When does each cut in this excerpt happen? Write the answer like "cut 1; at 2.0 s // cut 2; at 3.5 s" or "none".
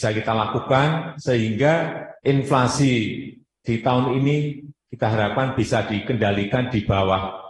cut 1; at 2.2 s